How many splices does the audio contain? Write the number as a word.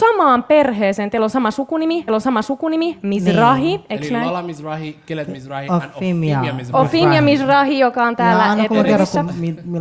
one